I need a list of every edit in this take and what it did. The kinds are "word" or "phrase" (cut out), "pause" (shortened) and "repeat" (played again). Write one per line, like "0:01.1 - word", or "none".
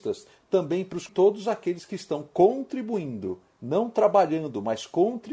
0:01.1 - phrase

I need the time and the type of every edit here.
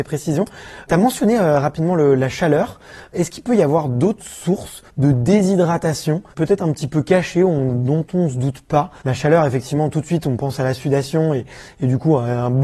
0:04.9 - pause
0:06.3 - pause
0:09.0 - pause

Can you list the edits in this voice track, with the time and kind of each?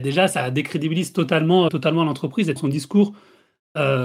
0:01.7 - word
0:02.6 - word

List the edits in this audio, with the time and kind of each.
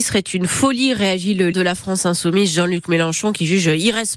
0:01.5 - word

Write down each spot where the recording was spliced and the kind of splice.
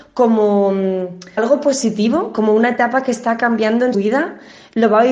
0:01.4 - word
0:03.9 - word

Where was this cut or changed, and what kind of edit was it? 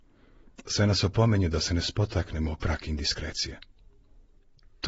none

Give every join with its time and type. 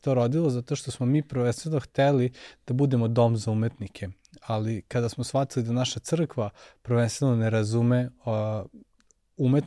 none

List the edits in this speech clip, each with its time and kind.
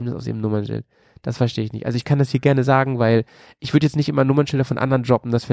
none

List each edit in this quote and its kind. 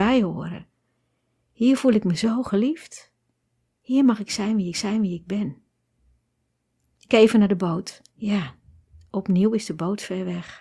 0:04.7 - repeat
0:07.1 - word
0:08.1 - pause

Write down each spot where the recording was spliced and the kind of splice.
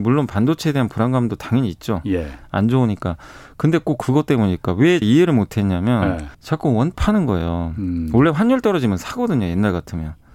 0:05.0 - word
0:06.3 - pause
0:06.9 - phrase

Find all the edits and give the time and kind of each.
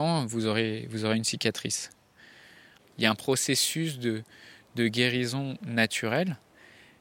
none

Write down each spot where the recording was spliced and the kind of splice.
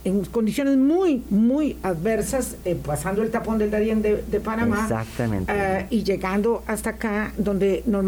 none

